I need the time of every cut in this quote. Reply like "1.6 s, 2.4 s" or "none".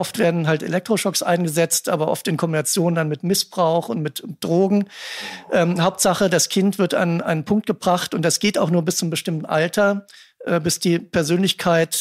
none